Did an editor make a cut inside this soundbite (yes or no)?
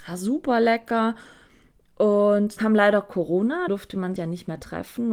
yes